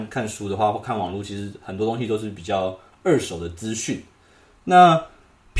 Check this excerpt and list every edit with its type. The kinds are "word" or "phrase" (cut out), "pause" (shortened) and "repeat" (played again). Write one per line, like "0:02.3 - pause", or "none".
none